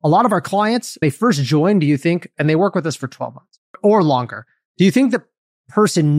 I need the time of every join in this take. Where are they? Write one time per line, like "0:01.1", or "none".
0:01.0